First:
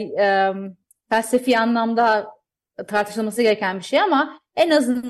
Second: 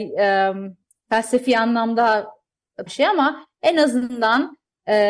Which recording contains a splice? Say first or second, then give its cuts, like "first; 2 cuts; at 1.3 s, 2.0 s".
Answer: second; 1 cut; at 2.9 s